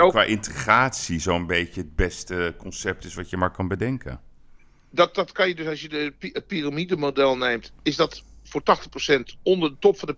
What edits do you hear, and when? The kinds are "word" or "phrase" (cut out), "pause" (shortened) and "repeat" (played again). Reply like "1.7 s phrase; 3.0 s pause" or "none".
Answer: none